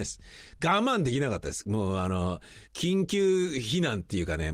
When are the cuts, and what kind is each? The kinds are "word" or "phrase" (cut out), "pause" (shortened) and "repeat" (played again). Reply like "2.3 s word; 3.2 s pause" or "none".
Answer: 2.6 s pause